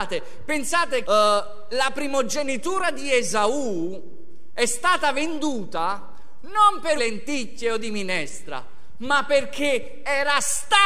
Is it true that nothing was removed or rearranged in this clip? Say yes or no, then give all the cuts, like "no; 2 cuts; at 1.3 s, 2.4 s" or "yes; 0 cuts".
no; 2 cuts; at 1.0 s, 7.0 s